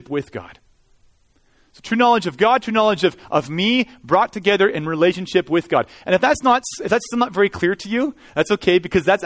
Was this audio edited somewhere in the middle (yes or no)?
no